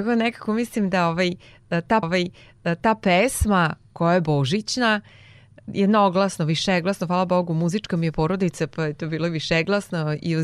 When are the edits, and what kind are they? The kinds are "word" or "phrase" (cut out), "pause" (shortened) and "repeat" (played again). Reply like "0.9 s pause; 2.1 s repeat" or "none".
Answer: 2.0 s repeat